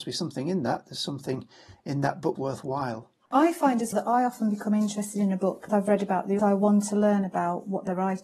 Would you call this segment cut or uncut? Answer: cut